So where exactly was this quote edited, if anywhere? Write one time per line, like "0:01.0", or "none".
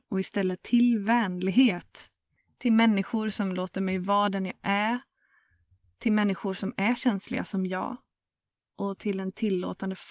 none